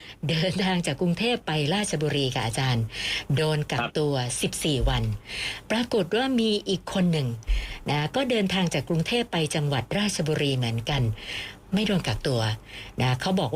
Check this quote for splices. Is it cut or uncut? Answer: uncut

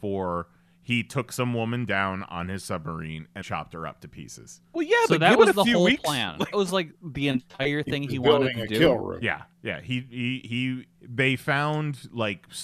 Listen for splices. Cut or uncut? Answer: cut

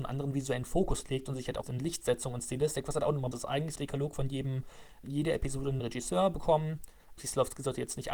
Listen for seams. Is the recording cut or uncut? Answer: cut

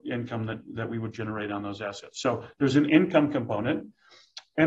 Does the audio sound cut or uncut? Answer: uncut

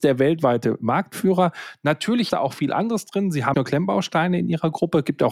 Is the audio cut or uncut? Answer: cut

